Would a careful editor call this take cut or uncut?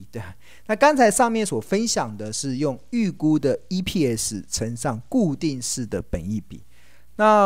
uncut